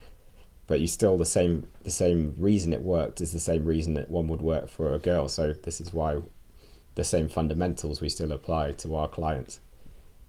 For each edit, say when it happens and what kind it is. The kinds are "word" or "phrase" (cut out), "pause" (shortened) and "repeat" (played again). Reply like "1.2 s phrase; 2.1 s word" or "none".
6.8 s pause